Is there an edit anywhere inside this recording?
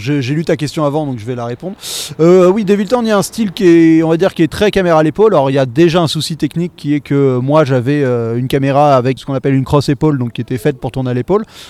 yes; 1 cut; at 9.2 s

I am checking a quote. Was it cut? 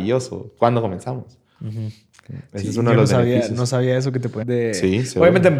yes; 1 cut; at 4.4 s

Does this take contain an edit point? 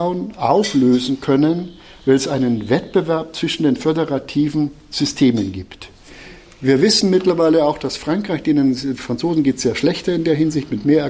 no; 0 cuts

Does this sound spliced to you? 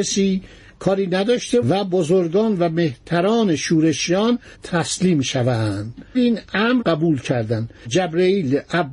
yes; 5 cuts; at 1.6 s, 4.5 s, 6.1 s, 6.8 s, 7.9 s

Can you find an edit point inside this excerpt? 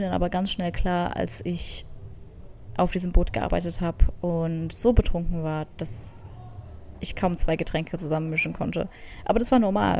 no; 0 cuts

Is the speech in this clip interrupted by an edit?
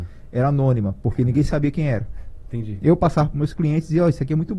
no; 0 cuts

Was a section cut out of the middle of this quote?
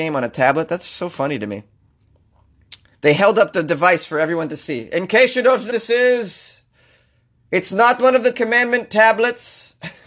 yes; 3 cuts; at 2.9 s, 5.7 s, 8.3 s

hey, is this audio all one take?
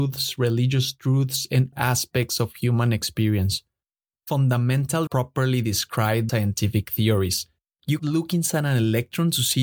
no; 4 cuts; at 1.7 s, 5.1 s, 6.3 s, 8.0 s

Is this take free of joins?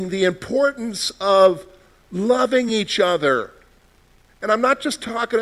yes; 0 cuts

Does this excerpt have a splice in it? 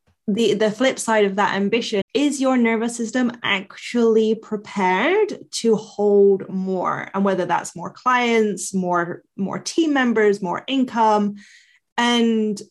yes; 1 cut; at 2.0 s

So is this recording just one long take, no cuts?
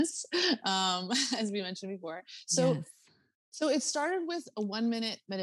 yes; 0 cuts

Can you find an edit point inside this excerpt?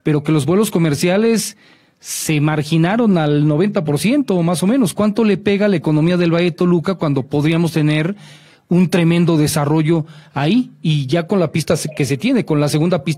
no; 0 cuts

